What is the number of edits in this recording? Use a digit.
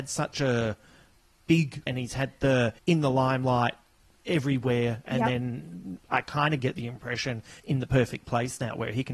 4